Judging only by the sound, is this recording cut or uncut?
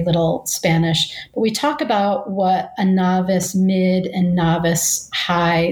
uncut